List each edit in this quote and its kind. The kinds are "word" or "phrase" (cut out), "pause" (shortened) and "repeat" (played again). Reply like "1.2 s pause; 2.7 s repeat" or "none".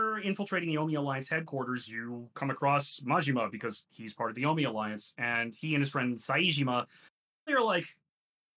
7.5 s word